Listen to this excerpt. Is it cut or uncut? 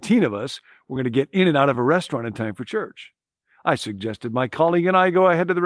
uncut